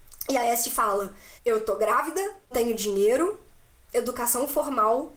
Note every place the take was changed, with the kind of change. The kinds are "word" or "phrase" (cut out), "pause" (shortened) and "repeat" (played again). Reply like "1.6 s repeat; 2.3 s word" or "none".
1.4 s pause; 2.5 s phrase; 3.9 s phrase